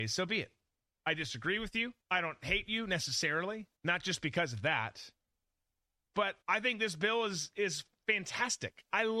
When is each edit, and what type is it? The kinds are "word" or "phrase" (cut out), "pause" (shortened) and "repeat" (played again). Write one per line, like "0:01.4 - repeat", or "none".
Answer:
0:02.0 - pause
0:03.8 - pause
0:06.4 - pause

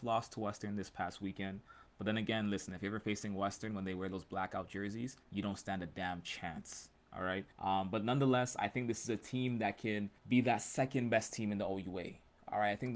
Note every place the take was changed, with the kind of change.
0:05.2 - pause
0:07.5 - pause
0:10.2 - pause

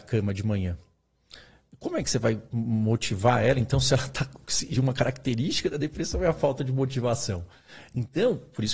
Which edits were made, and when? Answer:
none

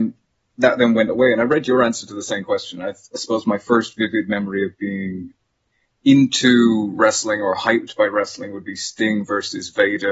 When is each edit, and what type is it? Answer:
none

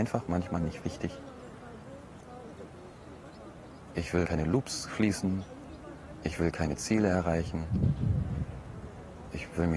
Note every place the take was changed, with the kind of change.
0:04.2 - word

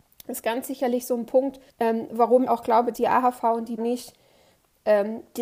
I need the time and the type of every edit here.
0:01.7 - pause
0:02.5 - word
0:02.9 - word
0:03.8 - word

